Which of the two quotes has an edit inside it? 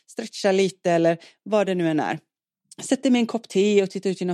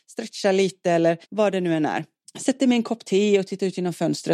second; 2 cuts; at 1.2 s, 2.2 s

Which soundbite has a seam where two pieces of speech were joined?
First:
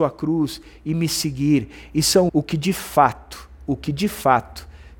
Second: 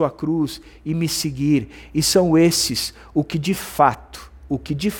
first; 1 cut; at 2.3 s

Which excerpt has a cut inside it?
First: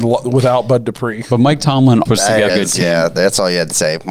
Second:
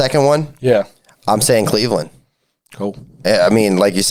first; 2 cuts; at 2.1 s, 2.5 s

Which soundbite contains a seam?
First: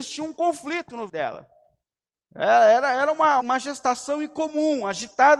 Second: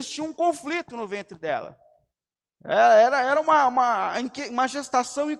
first; 2 cuts; at 1.1 s, 3.4 s

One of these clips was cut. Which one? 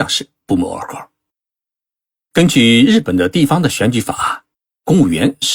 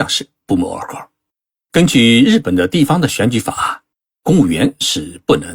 second; 1 cut; at 1.4 s

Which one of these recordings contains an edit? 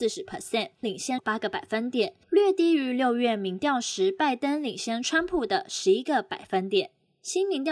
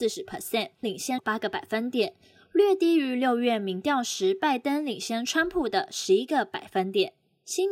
first; 1 cut; at 2.2 s

